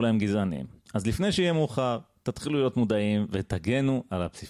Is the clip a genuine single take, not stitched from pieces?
yes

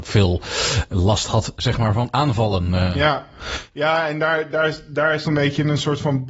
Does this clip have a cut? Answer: yes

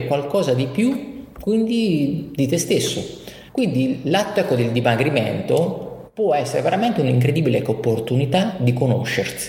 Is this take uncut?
no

